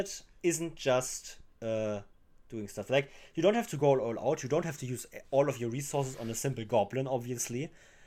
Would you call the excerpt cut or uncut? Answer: uncut